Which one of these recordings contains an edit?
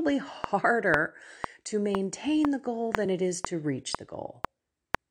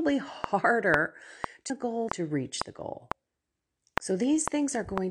second; 3 cuts; at 1.7 s, 2.1 s, 3.5 s

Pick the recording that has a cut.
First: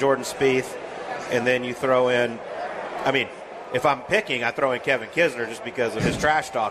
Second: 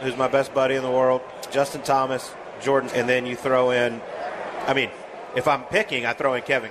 second; 2 cuts; at 1.5 s, 2.9 s

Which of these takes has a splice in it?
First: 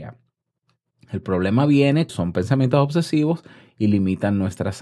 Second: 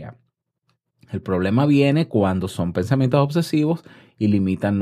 first; 1 cut; at 2.1 s

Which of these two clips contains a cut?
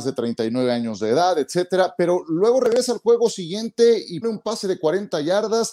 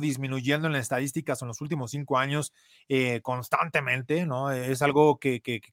first; 1 cut; at 4.2 s

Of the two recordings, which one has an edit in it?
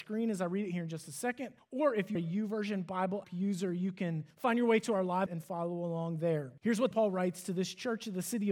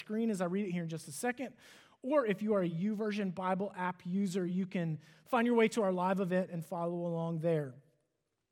first; 7 cuts; at 1.6 s, 2.2 s, 3.2 s, 4.3 s, 5.3 s, 6.6 s, 6.9 s

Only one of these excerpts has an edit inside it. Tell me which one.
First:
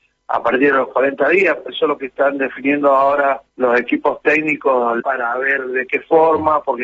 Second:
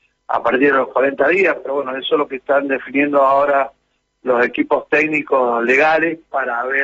first; 3 cuts; at 1.7 s, 3.5 s, 5.0 s

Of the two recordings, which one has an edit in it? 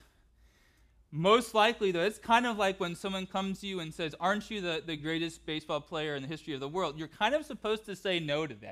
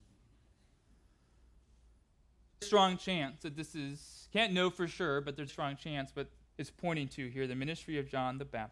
second; 3 cuts; at 2.6 s, 5.5 s, 6.5 s

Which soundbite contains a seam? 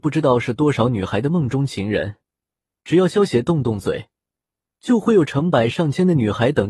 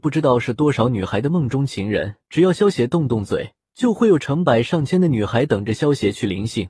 second; 2 cuts; at 2.2 s, 3.6 s

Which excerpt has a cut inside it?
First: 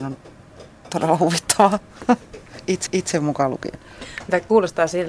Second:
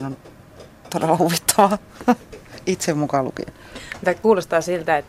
first; 1 cut; at 2.9 s

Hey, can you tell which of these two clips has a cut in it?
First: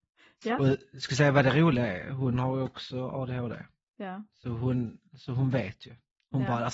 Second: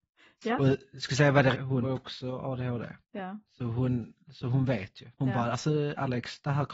second; 4 cuts; at 1.5 s, 1.8 s, 3.0 s, 5.1 s

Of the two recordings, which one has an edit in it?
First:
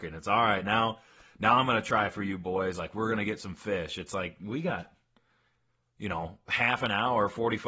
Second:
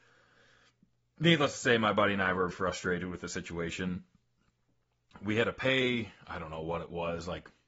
second; 1 cut; at 2.5 s

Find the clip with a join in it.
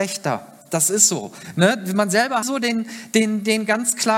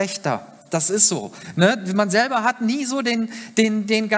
first; 1 cut; at 2.4 s

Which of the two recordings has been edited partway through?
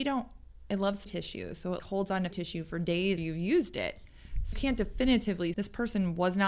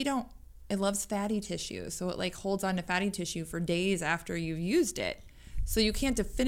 first; 6 cuts; at 1.1 s, 1.8 s, 2.3 s, 3.2 s, 4.5 s, 5.5 s

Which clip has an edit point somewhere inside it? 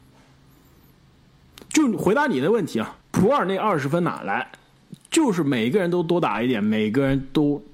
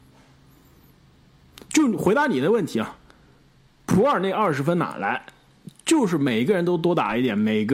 first; 1 cut; at 3.0 s

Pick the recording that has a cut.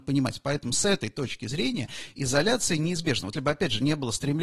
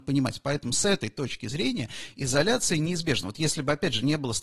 first; 1 cut; at 3.3 s

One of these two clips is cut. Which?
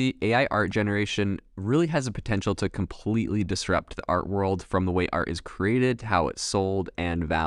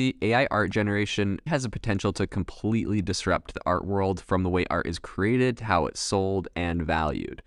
second; 1 cut; at 1.5 s

